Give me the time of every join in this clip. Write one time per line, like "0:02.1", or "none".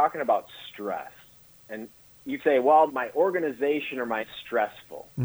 0:02.4
0:02.9
0:04.2